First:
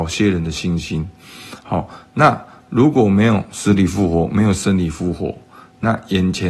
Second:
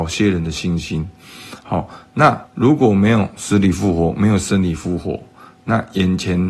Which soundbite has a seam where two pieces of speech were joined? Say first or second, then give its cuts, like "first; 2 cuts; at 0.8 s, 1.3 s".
second; 1 cut; at 2.5 s